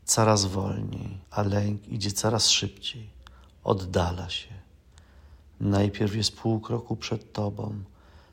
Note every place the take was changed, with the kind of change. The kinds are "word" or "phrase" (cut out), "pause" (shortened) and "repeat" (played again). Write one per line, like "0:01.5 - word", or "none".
0:01.2 - pause